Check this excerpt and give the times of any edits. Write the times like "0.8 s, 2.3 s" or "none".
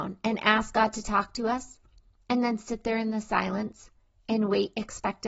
none